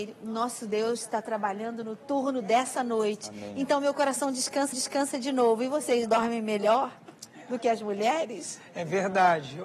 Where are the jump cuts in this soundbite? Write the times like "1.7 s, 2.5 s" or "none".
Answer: 4.7 s